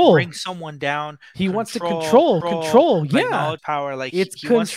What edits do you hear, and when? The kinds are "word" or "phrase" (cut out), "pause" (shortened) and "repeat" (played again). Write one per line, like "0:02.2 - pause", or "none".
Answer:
0:02.4 - repeat
0:03.6 - word